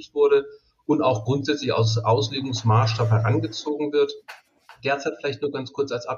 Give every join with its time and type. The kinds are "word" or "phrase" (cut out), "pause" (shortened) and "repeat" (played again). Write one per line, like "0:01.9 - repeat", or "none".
none